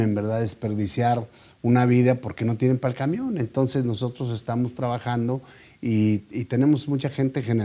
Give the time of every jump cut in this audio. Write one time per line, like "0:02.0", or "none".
none